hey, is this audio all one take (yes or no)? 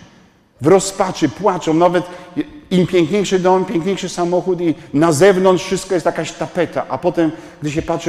yes